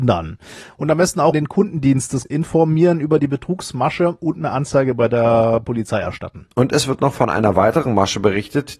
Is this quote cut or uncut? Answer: cut